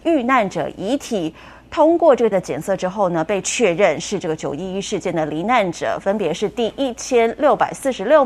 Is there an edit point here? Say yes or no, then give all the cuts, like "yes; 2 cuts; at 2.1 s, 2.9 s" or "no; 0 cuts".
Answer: yes; 1 cut; at 2.3 s